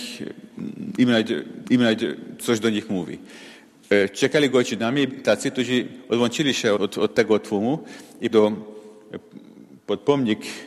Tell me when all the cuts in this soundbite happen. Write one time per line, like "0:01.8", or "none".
0:01.6
0:05.1
0:06.8
0:08.3